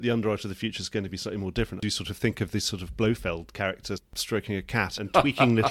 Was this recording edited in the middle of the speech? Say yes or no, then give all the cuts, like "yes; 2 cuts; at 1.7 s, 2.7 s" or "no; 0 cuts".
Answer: no; 0 cuts